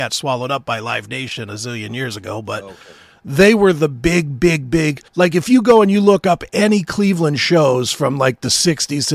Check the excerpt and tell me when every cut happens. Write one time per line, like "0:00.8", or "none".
0:05.1